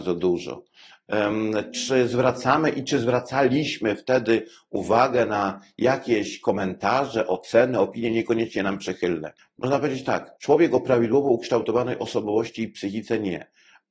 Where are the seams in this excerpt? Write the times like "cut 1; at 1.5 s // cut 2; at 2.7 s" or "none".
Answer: cut 1; at 9.4 s // cut 2; at 10.4 s

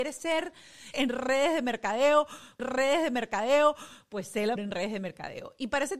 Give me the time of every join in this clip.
cut 1; at 0.9 s // cut 2; at 2.6 s // cut 3; at 4.6 s

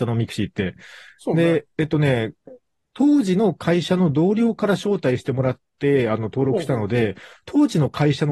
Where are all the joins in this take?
none

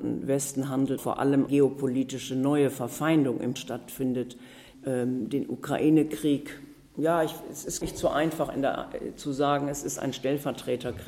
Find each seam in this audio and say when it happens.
cut 1; at 1.0 s // cut 2; at 1.5 s // cut 3; at 3.5 s // cut 4; at 4.7 s // cut 5; at 7.8 s

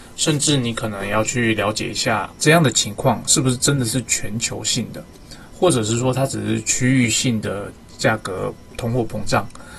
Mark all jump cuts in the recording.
cut 1; at 2.4 s

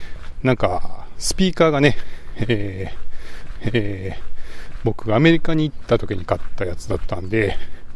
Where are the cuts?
cut 1; at 3.6 s

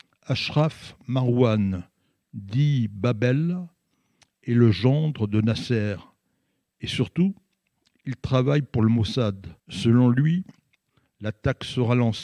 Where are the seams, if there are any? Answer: cut 1; at 9.6 s

